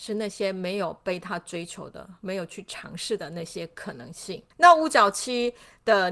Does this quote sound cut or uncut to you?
cut